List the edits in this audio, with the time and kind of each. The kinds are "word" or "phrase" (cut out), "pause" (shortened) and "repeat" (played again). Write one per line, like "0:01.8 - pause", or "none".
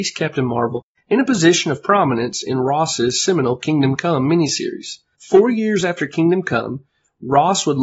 none